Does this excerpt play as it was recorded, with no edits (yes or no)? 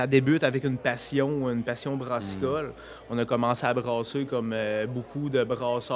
yes